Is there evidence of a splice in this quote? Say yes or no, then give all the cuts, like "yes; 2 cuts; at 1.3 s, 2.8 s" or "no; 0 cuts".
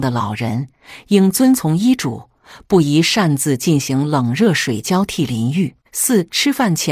yes; 1 cut; at 5.8 s